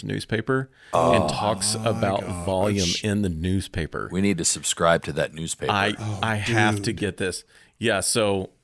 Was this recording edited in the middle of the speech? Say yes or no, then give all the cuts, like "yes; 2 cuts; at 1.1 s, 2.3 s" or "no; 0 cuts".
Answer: no; 0 cuts